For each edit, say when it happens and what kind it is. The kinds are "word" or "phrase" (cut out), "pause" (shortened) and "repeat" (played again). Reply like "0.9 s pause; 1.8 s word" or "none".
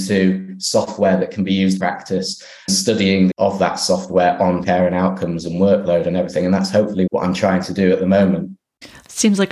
1.8 s word; 2.7 s word; 3.3 s word; 4.6 s word; 7.1 s word